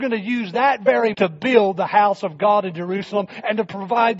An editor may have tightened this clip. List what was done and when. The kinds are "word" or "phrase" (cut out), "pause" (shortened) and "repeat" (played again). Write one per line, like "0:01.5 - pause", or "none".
0:01.1 - word